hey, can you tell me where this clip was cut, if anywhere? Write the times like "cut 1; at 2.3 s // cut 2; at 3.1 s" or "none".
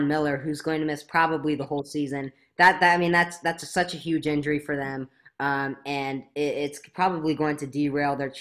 none